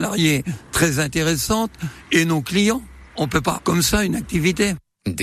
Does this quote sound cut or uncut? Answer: cut